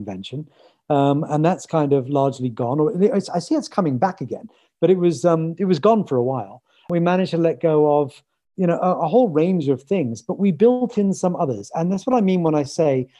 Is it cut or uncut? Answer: cut